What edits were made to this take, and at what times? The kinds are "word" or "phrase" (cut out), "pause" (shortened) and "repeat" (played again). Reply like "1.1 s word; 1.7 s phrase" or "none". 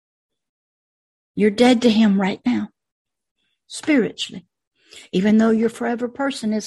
none